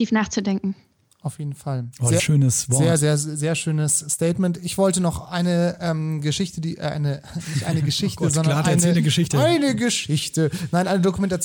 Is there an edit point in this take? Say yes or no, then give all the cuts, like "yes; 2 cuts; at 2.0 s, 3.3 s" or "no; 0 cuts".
yes; 2 cuts; at 2.2 s, 5.2 s